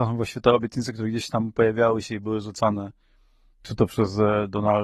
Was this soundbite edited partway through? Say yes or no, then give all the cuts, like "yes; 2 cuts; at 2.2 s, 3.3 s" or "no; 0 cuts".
no; 0 cuts